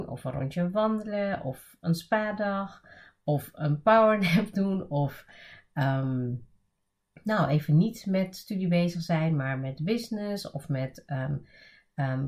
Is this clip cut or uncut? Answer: uncut